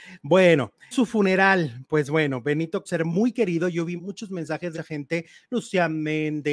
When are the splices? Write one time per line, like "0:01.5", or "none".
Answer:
0:00.9
0:02.9
0:04.0
0:04.7